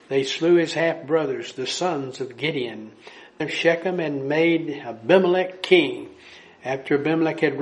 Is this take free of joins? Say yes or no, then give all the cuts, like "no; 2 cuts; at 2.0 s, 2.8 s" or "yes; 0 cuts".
no; 1 cut; at 3.4 s